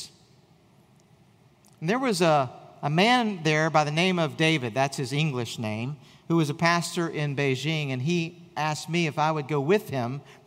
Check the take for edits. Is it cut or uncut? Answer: uncut